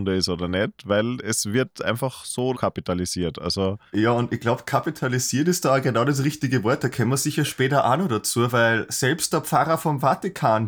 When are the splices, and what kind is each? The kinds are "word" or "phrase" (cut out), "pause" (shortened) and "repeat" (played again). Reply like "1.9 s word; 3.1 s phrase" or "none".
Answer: 2.5 s word